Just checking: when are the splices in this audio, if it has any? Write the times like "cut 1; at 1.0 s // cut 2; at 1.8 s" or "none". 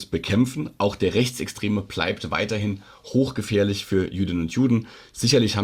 none